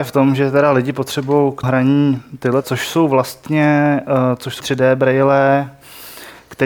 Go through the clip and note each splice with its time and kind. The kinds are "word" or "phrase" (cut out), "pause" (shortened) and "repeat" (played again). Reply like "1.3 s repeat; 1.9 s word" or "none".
1.6 s word; 2.6 s phrase; 4.6 s word